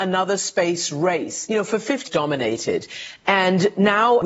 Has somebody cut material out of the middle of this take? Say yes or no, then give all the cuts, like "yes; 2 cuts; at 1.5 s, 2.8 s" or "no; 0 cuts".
yes; 1 cut; at 2.1 s